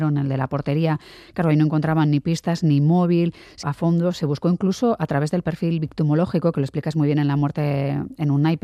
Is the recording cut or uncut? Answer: cut